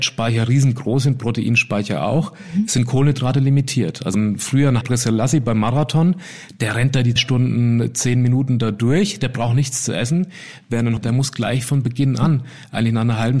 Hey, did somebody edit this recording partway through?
yes; 4 cuts; at 4.1 s, 4.8 s, 7.2 s, 11.0 s

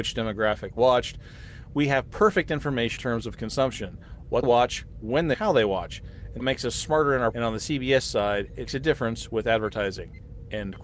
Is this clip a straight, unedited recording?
no; 6 cuts; at 3.0 s, 4.4 s, 5.3 s, 6.4 s, 7.3 s, 8.7 s

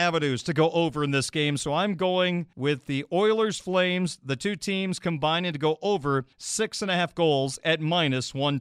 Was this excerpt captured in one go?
no; 2 cuts; at 2.5 s, 6.3 s

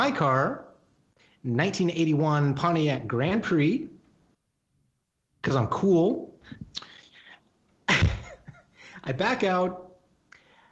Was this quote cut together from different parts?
no; 0 cuts

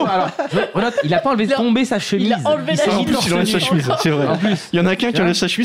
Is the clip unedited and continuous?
no; 1 cut; at 1.5 s

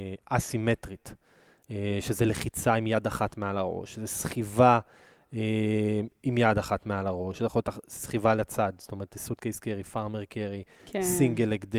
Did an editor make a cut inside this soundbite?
no; 0 cuts

